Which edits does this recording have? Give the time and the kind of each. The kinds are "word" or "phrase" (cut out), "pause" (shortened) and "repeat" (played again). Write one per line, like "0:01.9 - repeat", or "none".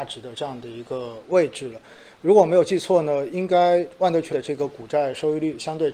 0:04.3 - word